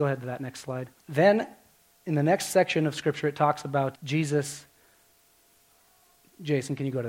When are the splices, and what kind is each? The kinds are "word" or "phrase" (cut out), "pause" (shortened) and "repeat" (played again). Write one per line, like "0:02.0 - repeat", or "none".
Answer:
0:01.0 - pause
0:03.9 - word